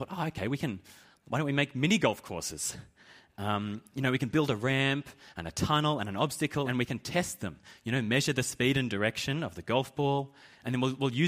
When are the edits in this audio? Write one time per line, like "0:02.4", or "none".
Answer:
0:06.6